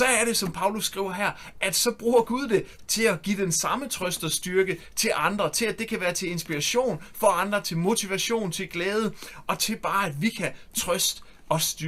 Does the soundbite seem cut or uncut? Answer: cut